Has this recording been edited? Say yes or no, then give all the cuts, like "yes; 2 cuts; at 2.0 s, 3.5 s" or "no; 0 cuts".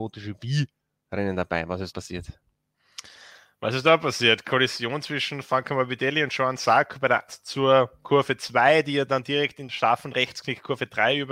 yes; 3 cuts; at 1.9 s, 7.3 s, 9.7 s